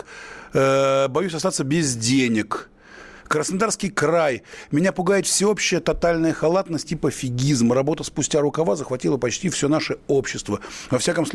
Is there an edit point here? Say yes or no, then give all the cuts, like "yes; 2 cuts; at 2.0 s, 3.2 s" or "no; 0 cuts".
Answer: no; 0 cuts